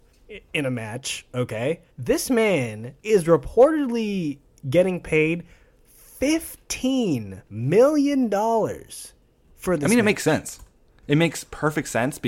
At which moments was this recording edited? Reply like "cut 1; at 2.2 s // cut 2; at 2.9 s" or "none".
cut 1; at 1.9 s // cut 2; at 3.0 s // cut 3; at 7.5 s